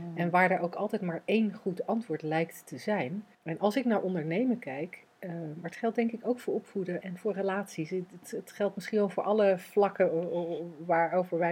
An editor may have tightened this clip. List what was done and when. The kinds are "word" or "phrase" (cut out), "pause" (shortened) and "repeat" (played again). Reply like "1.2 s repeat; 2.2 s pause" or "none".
3.3 s pause; 7.0 s word